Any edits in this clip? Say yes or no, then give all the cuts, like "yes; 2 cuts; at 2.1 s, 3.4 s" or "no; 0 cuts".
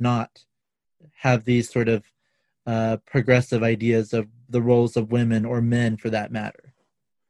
no; 0 cuts